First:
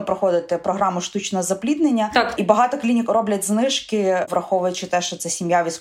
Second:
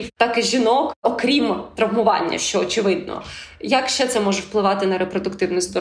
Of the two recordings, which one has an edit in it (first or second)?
first